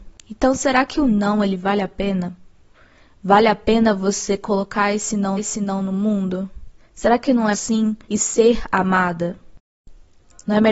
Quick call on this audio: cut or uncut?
cut